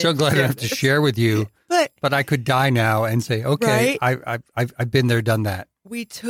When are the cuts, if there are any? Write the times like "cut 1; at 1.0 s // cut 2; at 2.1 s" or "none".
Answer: none

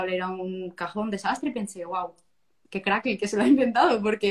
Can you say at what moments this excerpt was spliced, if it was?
none

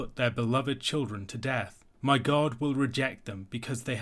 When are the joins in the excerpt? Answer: cut 1; at 1.9 s

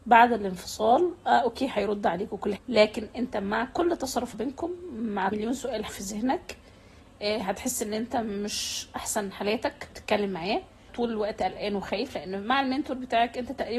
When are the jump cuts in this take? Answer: cut 1; at 2.6 s // cut 2; at 4.3 s // cut 3; at 5.3 s // cut 4; at 5.9 s // cut 5; at 9.9 s // cut 6; at 10.9 s

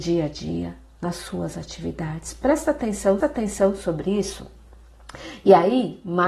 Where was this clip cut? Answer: cut 1; at 3.2 s

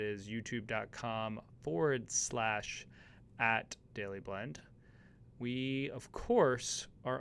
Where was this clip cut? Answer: none

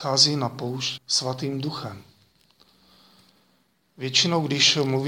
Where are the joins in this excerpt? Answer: cut 1; at 1.0 s

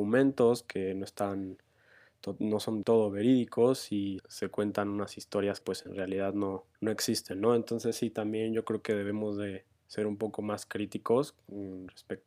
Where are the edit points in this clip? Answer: cut 1; at 2.8 s // cut 2; at 4.2 s // cut 3; at 5.6 s // cut 4; at 6.7 s

